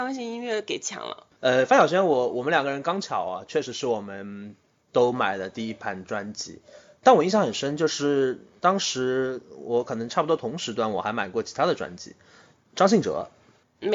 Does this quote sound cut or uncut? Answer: uncut